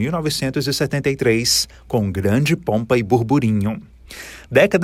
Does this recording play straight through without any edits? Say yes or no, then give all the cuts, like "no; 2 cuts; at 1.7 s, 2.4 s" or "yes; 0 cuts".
yes; 0 cuts